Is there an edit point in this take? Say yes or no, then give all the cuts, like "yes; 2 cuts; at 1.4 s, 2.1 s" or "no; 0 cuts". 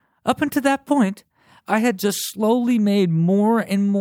no; 0 cuts